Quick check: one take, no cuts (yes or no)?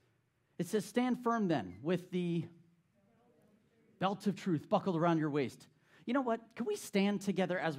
yes